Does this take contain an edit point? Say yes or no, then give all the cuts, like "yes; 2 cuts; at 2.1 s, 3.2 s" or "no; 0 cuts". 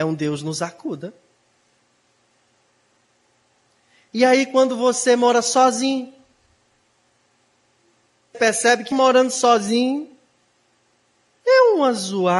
yes; 2 cuts; at 8.3 s, 8.9 s